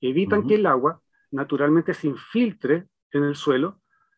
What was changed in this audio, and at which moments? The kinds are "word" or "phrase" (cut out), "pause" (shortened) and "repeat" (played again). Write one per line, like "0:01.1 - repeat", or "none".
none